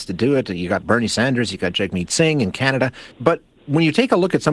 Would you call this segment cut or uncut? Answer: cut